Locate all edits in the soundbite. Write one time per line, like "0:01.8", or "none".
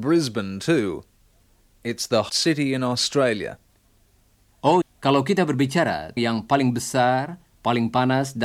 0:02.3
0:04.8
0:06.2